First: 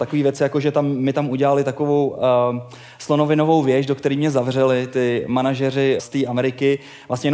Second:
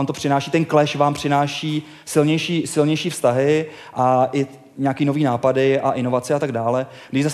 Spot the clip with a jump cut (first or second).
first